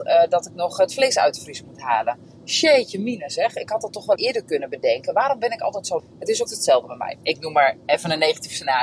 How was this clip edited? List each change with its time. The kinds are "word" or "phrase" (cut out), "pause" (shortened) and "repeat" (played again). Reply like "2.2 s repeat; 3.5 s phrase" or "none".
4.2 s word; 6.0 s word; 6.5 s word